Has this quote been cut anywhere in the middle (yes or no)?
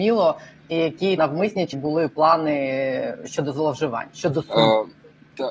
yes